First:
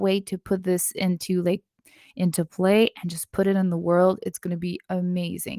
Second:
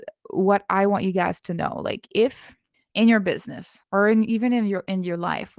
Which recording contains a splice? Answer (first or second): second